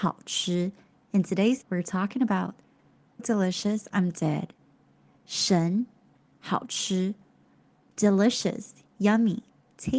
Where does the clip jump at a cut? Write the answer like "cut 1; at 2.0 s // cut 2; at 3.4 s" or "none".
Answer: cut 1; at 1.6 s // cut 2; at 3.2 s // cut 3; at 6.4 s